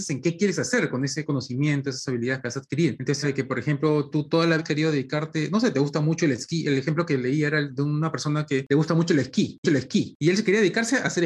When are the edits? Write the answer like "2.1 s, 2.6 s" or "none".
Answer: 3.2 s, 4.6 s, 9.6 s